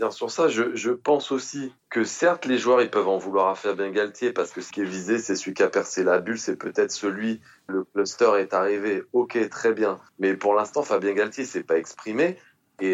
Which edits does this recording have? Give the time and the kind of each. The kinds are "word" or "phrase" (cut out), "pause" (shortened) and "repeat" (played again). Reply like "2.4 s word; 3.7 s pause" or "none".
1.8 s pause; 4.7 s word; 7.7 s phrase; 10.1 s pause